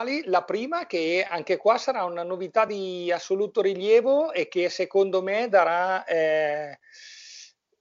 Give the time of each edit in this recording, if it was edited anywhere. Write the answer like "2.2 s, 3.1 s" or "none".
none